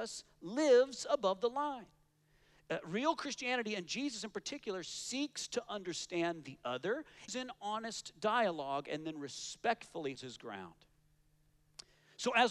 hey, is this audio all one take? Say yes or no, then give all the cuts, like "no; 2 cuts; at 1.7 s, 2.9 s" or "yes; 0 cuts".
no; 2 cuts; at 7.3 s, 10.2 s